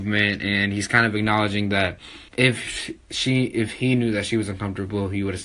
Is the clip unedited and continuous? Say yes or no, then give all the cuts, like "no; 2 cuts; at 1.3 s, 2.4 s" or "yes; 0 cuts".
no; 1 cut; at 2.3 s